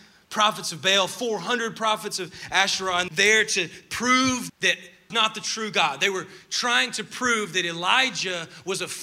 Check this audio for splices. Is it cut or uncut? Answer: cut